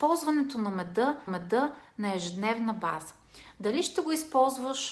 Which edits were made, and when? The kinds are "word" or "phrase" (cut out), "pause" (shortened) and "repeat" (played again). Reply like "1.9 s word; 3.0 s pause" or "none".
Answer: 1.3 s repeat

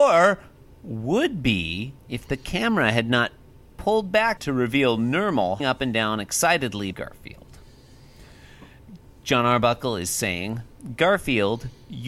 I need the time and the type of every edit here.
2.0 s pause; 4.4 s phrase; 5.6 s word; 6.9 s word

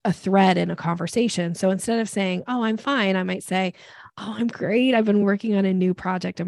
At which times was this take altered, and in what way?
none

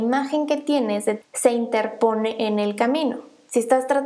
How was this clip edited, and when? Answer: 1.2 s word

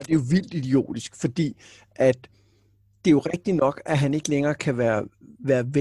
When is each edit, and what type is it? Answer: none

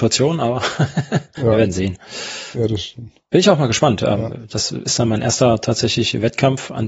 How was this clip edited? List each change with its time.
1.3 s pause

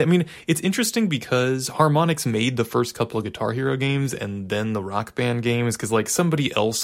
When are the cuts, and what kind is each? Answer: none

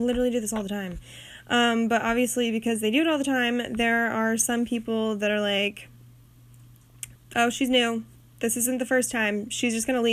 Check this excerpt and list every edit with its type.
7.1 s word

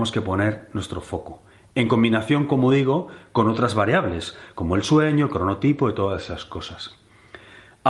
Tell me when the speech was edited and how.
none

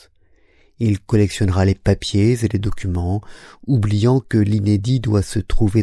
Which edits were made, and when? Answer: none

